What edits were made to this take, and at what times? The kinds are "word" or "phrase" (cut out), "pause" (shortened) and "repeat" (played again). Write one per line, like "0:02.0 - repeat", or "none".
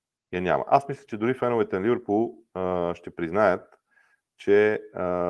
none